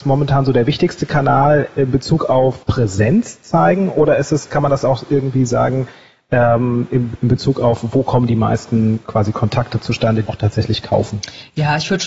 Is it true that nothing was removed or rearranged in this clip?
no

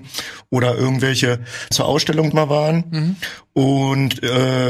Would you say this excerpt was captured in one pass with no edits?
no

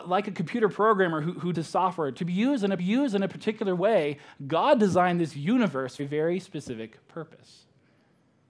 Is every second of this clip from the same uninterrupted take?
no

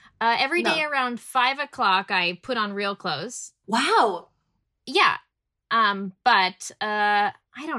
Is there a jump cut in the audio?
no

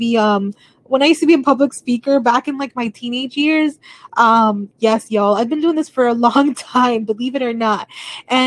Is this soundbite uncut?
yes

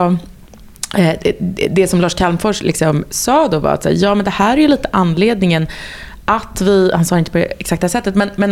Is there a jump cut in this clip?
no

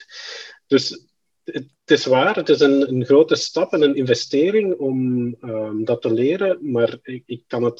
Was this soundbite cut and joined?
no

